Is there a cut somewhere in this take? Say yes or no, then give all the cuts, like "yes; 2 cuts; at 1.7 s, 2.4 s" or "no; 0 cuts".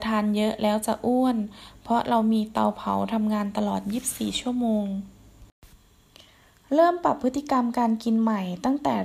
no; 0 cuts